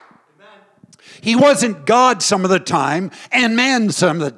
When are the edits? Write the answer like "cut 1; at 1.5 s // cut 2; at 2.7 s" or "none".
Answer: none